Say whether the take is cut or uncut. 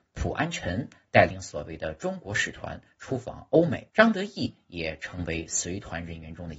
cut